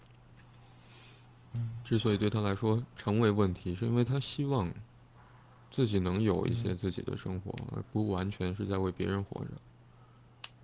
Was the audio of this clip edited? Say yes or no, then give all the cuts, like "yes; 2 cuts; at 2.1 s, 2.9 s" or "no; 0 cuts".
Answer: no; 0 cuts